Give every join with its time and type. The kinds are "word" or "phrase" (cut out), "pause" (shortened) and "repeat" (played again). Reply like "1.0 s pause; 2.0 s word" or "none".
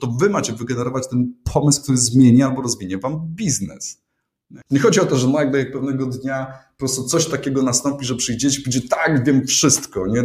4.6 s pause